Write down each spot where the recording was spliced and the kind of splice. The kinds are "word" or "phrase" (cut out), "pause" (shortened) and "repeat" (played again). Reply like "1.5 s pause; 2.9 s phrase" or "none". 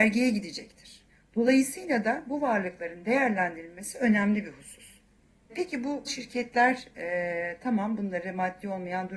1.1 s pause; 6.1 s word